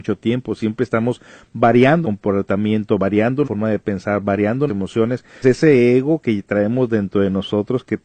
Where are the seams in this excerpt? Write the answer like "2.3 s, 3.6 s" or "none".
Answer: 2.0 s, 3.4 s, 4.7 s, 5.4 s